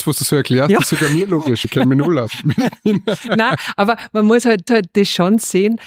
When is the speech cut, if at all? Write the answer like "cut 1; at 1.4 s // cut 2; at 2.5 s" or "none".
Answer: cut 1; at 1.6 s // cut 2; at 4.7 s